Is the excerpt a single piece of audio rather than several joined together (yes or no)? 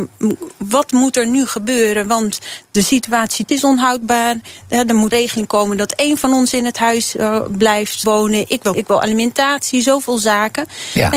no